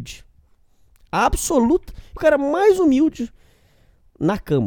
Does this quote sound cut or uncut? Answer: cut